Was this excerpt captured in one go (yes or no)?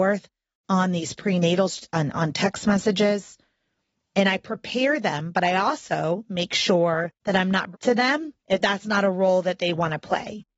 no